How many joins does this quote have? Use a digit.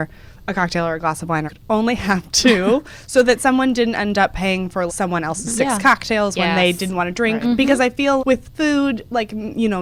3